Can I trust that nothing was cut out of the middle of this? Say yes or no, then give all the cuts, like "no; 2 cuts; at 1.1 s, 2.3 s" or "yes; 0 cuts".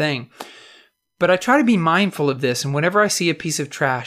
yes; 0 cuts